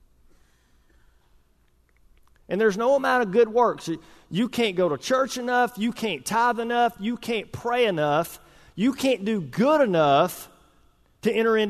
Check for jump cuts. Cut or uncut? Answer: uncut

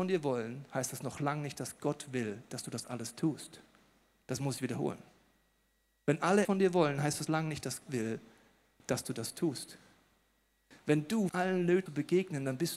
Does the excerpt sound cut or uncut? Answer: cut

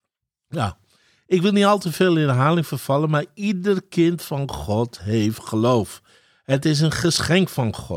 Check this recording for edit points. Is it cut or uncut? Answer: uncut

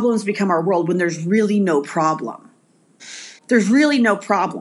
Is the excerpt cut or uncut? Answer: cut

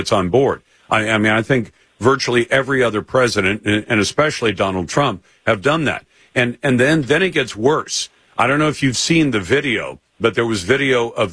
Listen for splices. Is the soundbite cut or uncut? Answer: uncut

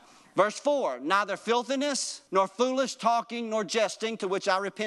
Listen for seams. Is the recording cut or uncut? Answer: cut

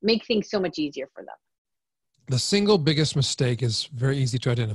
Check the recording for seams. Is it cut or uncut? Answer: uncut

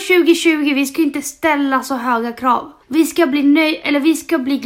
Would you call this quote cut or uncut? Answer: cut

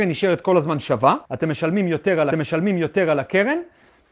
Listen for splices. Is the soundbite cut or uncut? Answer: cut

